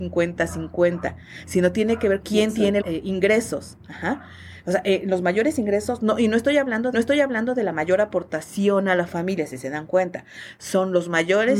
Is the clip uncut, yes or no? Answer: no